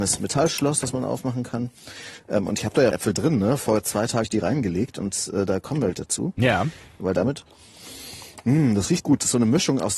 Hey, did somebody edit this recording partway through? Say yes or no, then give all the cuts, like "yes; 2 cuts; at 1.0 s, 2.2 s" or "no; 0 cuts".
yes; 4 cuts; at 2.9 s, 4.2 s, 5.9 s, 9.0 s